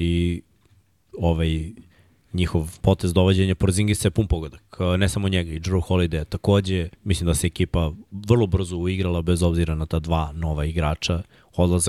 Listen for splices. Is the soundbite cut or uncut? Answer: cut